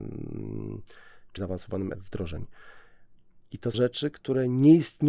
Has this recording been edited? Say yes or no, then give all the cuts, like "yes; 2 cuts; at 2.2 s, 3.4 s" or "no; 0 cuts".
yes; 3 cuts; at 1.4 s, 1.9 s, 3.7 s